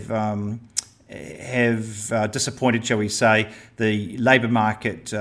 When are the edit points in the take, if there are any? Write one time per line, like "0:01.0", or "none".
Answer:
none